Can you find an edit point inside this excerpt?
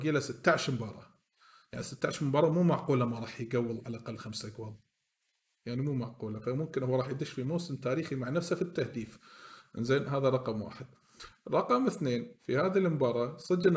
no; 0 cuts

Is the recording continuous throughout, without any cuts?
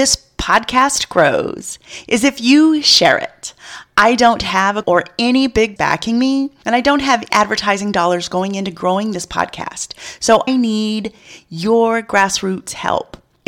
no; 4 cuts; at 4.8 s, 5.8 s, 7.3 s, 10.5 s

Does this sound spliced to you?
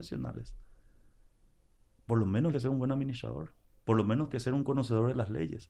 yes; 3 cuts; at 2.5 s, 3.7 s, 4.3 s

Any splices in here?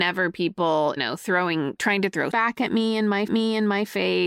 yes; 3 cuts; at 1.0 s, 2.3 s, 3.3 s

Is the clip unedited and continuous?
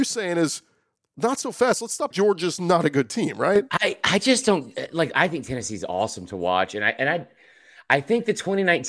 no; 1 cut; at 2.1 s

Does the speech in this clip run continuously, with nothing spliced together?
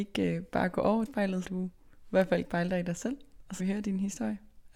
no; 4 cuts; at 1.1 s, 1.4 s, 2.4 s, 3.6 s

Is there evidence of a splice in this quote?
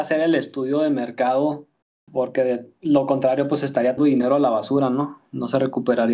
yes; 2 cuts; at 1.8 s, 4.0 s

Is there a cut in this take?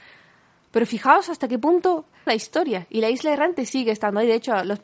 yes; 1 cut; at 2.3 s

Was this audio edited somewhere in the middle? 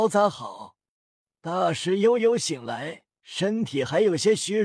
yes; 2 cuts; at 0.9 s, 3.1 s

